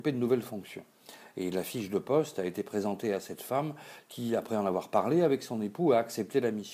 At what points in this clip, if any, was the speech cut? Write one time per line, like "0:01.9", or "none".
none